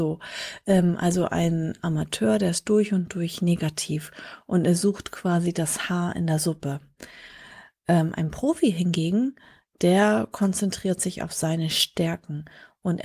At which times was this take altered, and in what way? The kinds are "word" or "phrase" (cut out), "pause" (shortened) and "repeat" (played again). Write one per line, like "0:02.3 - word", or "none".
none